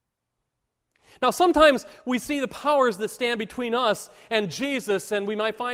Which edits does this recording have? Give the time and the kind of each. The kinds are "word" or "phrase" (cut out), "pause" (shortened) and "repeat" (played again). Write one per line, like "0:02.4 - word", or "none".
none